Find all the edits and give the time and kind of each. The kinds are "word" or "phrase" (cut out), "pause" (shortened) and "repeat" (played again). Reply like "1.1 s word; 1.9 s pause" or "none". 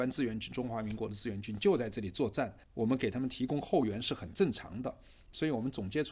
2.6 s pause